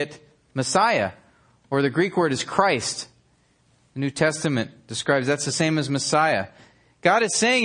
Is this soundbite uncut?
yes; 0 cuts

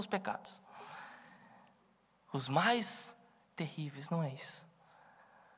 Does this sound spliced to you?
no; 0 cuts

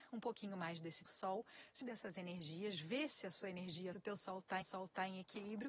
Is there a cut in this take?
yes; 4 cuts; at 1.1 s, 1.8 s, 3.9 s, 4.6 s

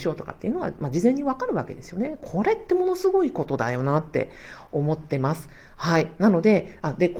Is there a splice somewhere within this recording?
no; 0 cuts

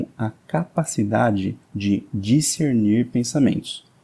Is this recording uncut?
no; 1 cut; at 1.6 s

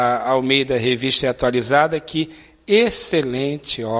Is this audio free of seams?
yes; 0 cuts

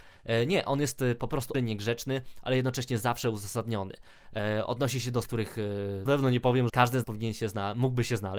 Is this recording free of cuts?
no; 5 cuts; at 1.5 s, 5.2 s, 6.1 s, 6.7 s, 7.0 s

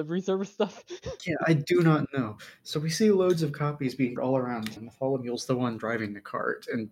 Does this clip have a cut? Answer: yes; 2 cuts; at 4.2 s, 4.8 s

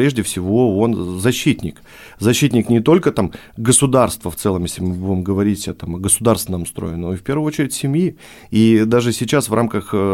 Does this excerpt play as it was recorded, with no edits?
yes; 0 cuts

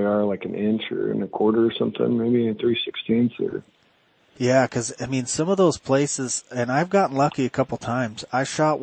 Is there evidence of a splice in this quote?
no; 0 cuts

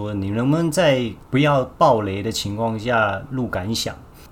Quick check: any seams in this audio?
yes; 1 cut; at 1.2 s

